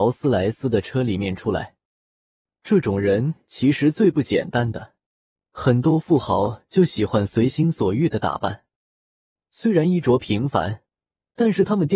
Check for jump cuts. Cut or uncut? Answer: uncut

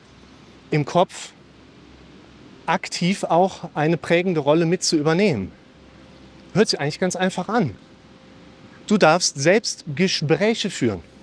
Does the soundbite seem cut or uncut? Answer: uncut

